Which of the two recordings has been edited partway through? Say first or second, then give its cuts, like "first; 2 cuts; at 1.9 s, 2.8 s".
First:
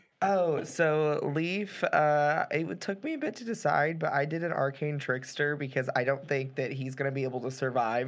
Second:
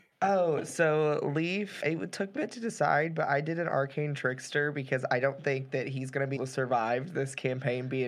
second; 3 cuts; at 1.8 s, 2.4 s, 6.4 s